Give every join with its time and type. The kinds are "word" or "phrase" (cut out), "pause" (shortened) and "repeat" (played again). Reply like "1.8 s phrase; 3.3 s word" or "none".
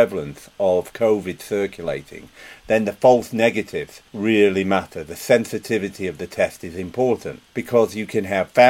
4.1 s pause; 7.5 s pause